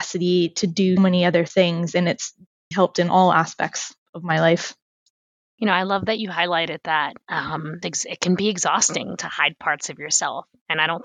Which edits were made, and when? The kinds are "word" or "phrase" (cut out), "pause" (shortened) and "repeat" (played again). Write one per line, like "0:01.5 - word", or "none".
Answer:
0:01.0 - word
0:02.7 - word
0:07.8 - word